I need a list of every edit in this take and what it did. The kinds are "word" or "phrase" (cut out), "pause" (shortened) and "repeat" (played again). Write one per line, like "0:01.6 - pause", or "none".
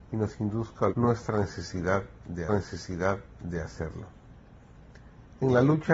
0:00.9 - word
0:02.5 - repeat